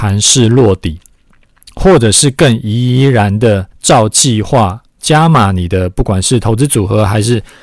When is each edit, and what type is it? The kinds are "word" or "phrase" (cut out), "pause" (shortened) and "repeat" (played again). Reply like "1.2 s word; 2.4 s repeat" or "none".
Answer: 3.7 s pause; 4.9 s pause